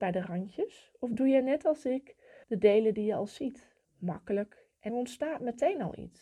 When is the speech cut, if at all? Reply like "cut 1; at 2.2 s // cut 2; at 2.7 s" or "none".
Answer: cut 1; at 2.4 s // cut 2; at 3.8 s // cut 3; at 4.9 s